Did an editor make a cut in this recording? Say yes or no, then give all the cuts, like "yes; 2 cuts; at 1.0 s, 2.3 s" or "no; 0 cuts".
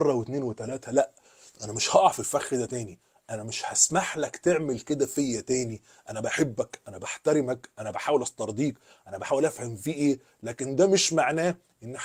no; 0 cuts